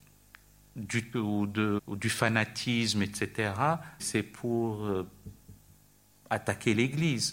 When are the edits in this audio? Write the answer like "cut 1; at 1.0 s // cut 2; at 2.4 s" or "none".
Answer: cut 1; at 1.1 s // cut 2; at 1.8 s // cut 3; at 4.0 s

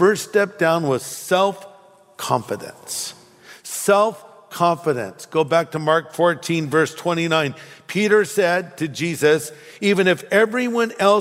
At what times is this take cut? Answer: none

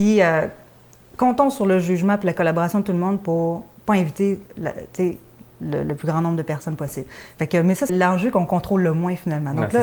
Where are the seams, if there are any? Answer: cut 1; at 7.9 s

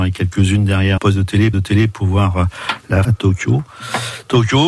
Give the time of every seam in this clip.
cut 1; at 1.0 s // cut 2; at 1.5 s // cut 3; at 3.0 s

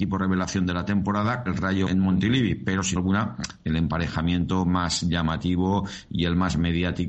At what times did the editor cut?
cut 1; at 1.5 s // cut 2; at 1.9 s // cut 3; at 3.0 s

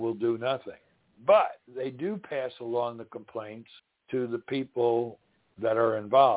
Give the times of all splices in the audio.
cut 1; at 1.7 s // cut 2; at 3.8 s

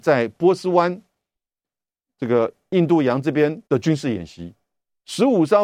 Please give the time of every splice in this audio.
cut 1; at 3.7 s

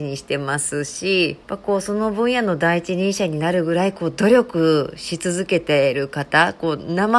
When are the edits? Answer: cut 1; at 1.4 s

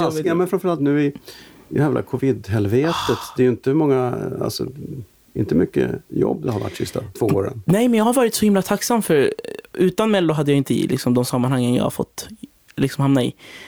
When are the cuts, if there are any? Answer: cut 1; at 10.6 s

